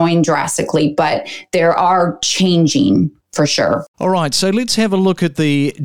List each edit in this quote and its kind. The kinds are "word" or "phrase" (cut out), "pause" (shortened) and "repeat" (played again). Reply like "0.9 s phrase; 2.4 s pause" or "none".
3.9 s pause